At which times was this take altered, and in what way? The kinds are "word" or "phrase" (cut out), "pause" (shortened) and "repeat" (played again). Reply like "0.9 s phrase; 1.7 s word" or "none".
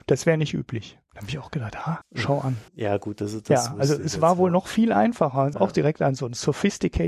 2.0 s word; 2.7 s pause; 5.5 s phrase